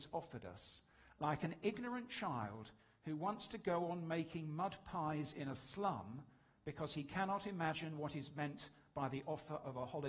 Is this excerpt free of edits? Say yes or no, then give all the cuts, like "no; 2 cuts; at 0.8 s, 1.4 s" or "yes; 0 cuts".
yes; 0 cuts